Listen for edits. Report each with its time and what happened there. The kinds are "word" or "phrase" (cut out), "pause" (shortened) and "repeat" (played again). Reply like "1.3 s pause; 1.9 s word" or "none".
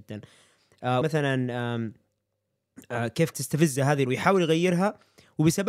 1.0 s word; 3.3 s word; 4.1 s word